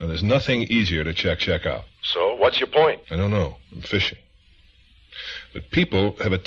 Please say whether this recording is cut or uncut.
cut